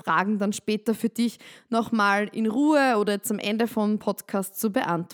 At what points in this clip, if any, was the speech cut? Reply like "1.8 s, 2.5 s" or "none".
none

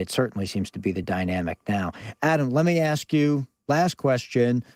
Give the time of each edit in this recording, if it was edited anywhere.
none

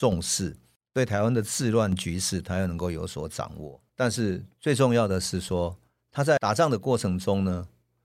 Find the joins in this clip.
3.9 s

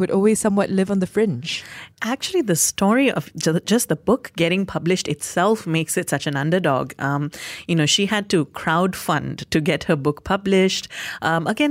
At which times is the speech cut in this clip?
1.9 s

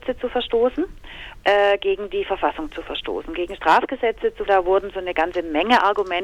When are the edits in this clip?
1.4 s, 4.5 s

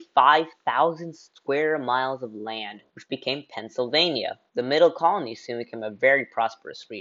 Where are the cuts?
2.9 s, 4.5 s

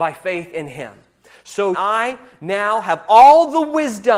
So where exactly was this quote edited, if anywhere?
1.7 s

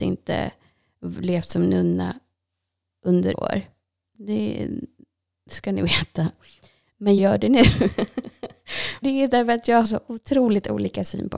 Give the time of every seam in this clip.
3.3 s, 7.2 s, 9.0 s, 9.8 s

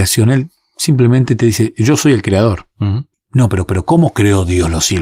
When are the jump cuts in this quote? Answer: 3.7 s

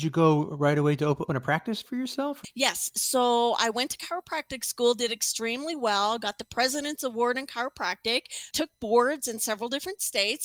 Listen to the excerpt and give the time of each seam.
1.3 s

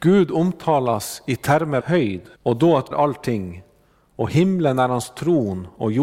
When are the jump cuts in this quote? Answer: 1.8 s, 2.4 s, 2.9 s

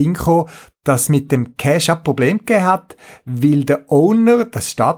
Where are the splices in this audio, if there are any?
none

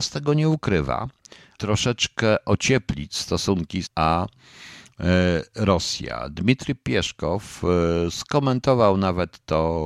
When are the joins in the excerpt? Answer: 1.6 s, 3.8 s

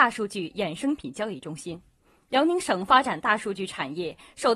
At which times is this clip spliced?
none

